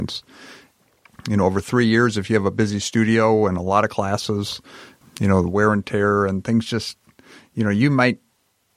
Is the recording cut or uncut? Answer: uncut